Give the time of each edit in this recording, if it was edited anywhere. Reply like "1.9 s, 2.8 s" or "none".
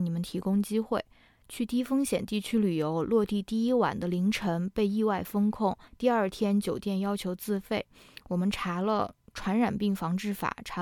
1.3 s, 5.8 s